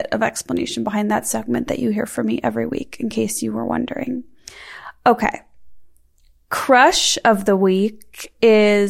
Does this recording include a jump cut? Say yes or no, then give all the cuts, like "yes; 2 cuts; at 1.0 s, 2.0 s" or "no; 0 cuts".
no; 0 cuts